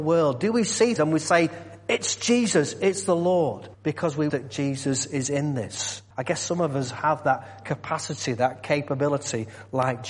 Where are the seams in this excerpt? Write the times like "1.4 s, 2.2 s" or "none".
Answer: 1.0 s, 3.7 s, 4.3 s, 6.1 s